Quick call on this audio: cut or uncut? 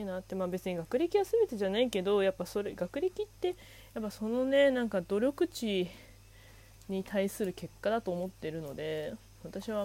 uncut